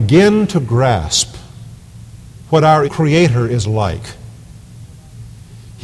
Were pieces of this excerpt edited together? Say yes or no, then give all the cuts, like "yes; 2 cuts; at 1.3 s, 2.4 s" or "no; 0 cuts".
yes; 1 cut; at 2.8 s